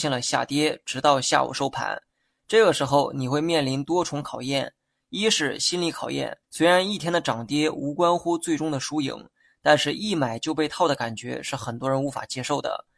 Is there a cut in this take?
yes; 1 cut; at 6.4 s

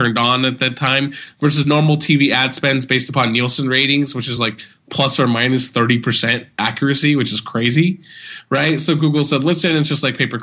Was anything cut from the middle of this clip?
no; 0 cuts

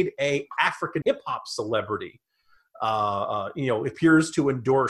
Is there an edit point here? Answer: yes; 1 cut; at 1.0 s

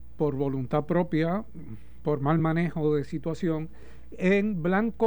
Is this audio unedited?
yes; 0 cuts

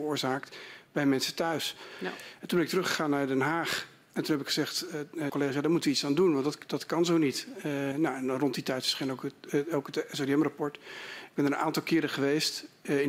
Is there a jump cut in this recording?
yes; 2 cuts; at 5.3 s, 7.9 s

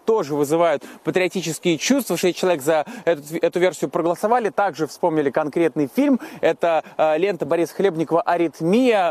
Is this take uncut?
yes; 0 cuts

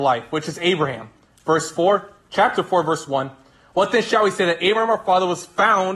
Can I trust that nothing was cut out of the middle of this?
yes; 0 cuts

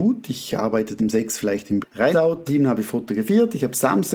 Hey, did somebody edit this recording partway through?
yes; 4 cuts; at 1.0 s, 1.8 s, 2.1 s, 2.5 s

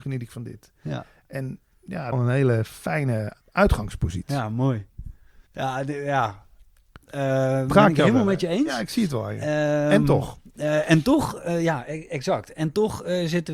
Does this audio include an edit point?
yes; 3 cuts; at 2.1 s, 3.4 s, 5.5 s

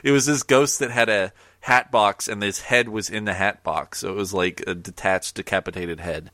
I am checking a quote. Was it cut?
no; 0 cuts

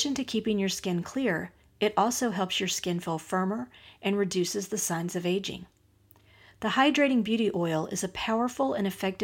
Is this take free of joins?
yes; 0 cuts

